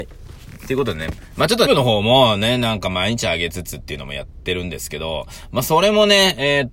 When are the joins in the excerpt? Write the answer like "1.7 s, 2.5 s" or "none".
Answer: 1.7 s